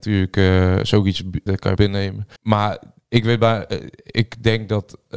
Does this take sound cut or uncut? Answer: cut